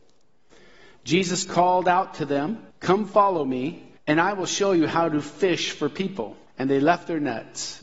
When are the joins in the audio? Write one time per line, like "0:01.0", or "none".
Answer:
0:02.7
0:04.0
0:06.5